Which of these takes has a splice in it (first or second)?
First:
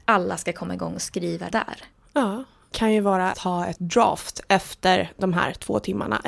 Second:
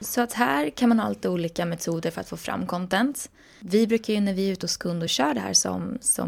first